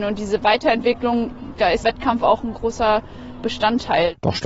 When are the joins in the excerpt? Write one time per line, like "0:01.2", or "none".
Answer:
0:01.8